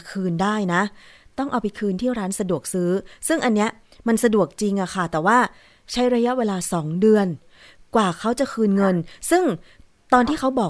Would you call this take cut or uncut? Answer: uncut